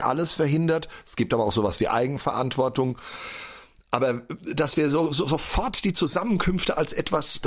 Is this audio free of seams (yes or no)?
yes